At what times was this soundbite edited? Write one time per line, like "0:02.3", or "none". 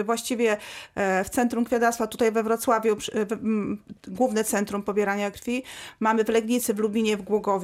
0:04.0